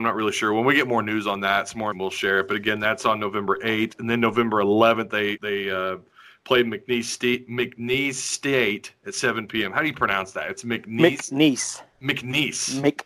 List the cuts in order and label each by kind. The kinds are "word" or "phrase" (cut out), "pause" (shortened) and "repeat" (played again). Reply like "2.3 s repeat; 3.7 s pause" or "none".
1.9 s word; 5.4 s word